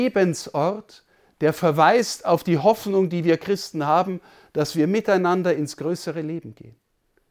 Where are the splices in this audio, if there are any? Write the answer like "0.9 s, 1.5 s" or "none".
none